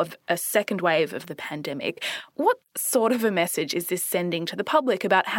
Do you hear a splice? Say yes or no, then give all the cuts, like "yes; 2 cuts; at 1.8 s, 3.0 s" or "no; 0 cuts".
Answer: yes; 1 cut; at 2.3 s